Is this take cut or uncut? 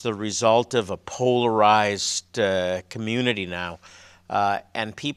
uncut